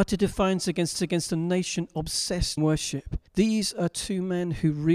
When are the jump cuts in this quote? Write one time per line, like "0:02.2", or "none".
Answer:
0:01.0
0:02.6
0:03.3